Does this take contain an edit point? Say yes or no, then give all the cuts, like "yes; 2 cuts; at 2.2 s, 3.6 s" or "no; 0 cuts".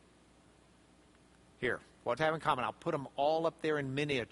yes; 1 cut; at 2.2 s